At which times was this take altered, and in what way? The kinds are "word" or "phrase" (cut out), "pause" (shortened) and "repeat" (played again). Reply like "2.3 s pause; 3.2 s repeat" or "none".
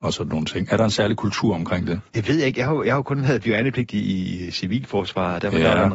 2.1 s pause